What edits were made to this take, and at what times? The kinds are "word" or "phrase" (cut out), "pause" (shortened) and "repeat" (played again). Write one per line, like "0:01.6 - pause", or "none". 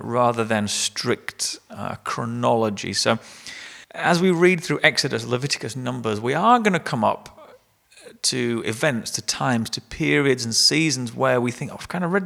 0:03.8 - pause